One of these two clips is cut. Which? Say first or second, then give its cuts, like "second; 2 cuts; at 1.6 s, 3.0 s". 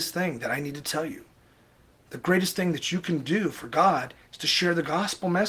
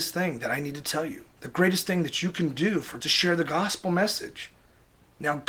second; 2 cuts; at 1.3 s, 3.0 s